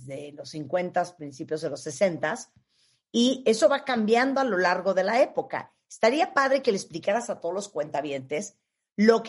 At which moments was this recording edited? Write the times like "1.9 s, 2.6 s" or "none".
none